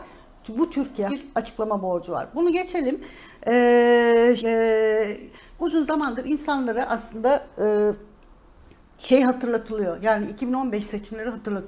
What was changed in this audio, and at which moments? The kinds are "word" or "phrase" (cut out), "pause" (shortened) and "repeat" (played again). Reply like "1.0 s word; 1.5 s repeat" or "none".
1.1 s word; 4.4 s word; 5.6 s word